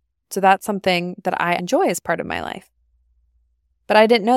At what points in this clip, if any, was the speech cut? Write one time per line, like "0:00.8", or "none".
0:01.6